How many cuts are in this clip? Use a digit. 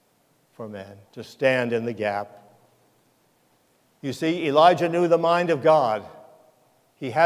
1